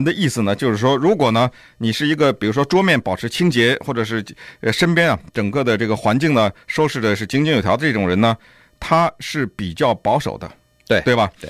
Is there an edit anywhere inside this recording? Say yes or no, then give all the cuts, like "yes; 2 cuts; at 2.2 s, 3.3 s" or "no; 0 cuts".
no; 0 cuts